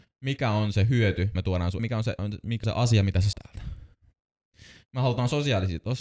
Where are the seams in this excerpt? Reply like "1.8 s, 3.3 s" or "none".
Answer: 1.3 s, 1.8 s, 2.2 s, 2.6 s, 3.3 s